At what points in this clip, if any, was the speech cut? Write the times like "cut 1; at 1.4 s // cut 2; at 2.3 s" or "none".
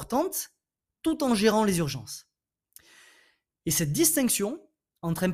none